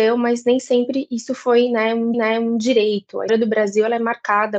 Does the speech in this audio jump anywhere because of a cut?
yes; 2 cuts; at 2.1 s, 3.3 s

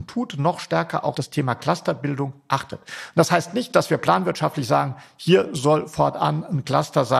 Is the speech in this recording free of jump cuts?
no; 1 cut; at 1.1 s

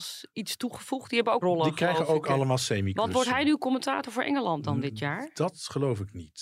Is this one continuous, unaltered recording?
no; 1 cut; at 1.4 s

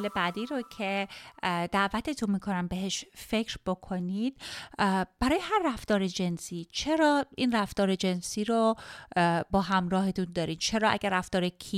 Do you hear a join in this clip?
no; 0 cuts

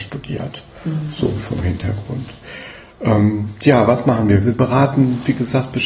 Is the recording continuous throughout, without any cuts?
yes; 0 cuts

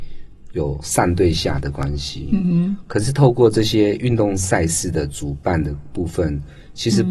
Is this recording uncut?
yes; 0 cuts

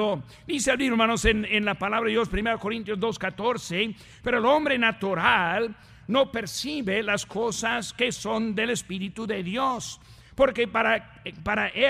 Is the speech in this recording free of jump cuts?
yes; 0 cuts

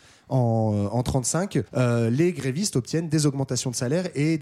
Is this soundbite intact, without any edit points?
no; 1 cut; at 1.7 s

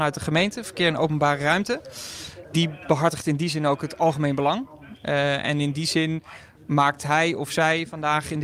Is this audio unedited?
yes; 0 cuts

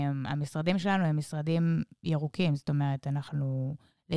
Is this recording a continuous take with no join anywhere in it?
yes; 0 cuts

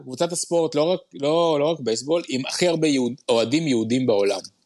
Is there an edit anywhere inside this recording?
no; 0 cuts

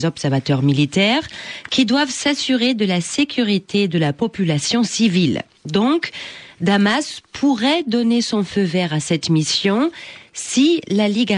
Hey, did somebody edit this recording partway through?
no; 0 cuts

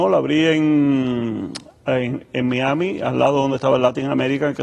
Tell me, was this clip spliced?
no; 0 cuts

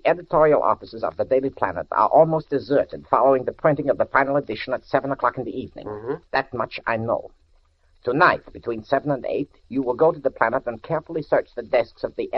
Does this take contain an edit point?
no; 0 cuts

